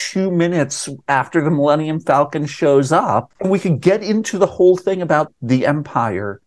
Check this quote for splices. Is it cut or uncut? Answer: uncut